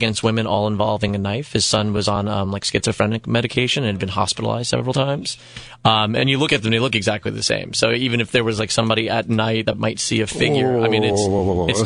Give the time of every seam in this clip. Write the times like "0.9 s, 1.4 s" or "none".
none